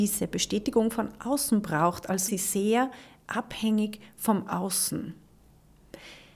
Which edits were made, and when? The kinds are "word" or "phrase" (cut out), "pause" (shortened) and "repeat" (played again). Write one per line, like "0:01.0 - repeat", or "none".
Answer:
0:02.3 - word